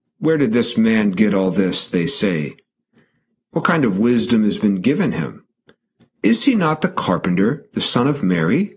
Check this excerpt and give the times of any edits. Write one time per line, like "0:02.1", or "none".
none